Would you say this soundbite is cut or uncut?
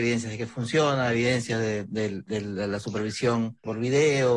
uncut